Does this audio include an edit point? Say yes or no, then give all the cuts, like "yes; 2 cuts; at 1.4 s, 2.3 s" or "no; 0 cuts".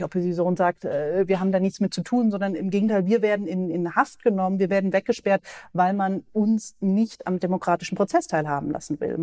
no; 0 cuts